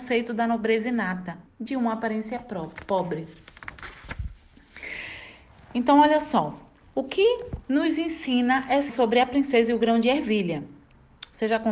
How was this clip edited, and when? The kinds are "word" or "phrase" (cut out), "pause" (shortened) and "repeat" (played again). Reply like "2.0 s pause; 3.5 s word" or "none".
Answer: 1.5 s word; 8.9 s word